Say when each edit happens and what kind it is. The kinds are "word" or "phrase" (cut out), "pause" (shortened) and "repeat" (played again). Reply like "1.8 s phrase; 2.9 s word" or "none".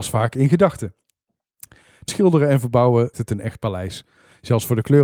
2.1 s word; 3.1 s word